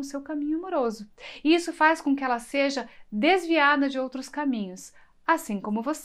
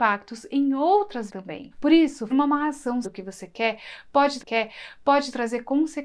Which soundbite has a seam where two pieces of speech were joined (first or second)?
second